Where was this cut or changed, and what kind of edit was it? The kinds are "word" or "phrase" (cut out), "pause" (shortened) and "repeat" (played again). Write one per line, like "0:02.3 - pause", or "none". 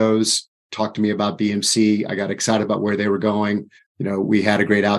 0:03.8 - pause